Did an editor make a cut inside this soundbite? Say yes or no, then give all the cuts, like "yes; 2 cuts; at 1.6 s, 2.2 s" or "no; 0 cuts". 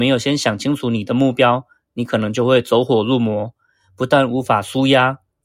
no; 0 cuts